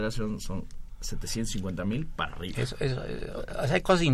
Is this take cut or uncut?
uncut